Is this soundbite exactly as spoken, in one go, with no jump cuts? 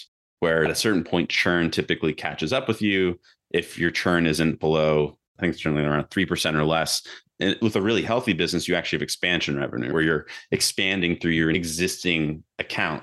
no; 1 cut; at 5.3 s

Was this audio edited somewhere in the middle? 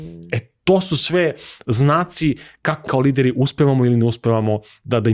yes; 1 cut; at 2.9 s

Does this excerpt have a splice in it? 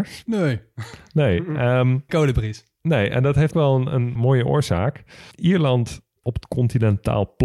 yes; 4 cuts; at 2.1 s, 3.5 s, 4.2 s, 6.2 s

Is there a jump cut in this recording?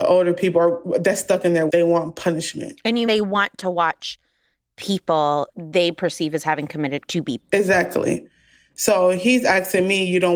yes; 5 cuts; at 1.7 s, 3.1 s, 5.5 s, 7.1 s, 7.4 s

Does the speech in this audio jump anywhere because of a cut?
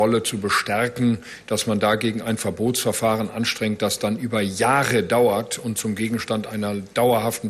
no; 0 cuts

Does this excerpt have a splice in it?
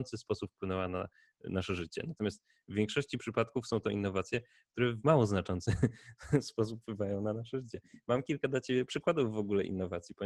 no; 0 cuts

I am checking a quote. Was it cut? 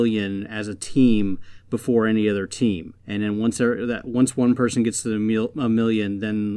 yes; 1 cut; at 3.0 s

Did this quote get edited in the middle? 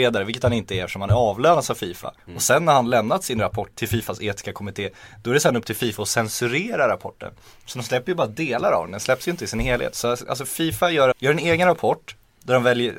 yes; 3 cuts; at 2.2 s, 3.7 s, 11.1 s

